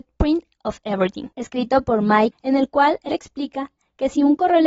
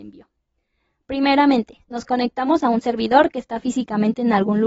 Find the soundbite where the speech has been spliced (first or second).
first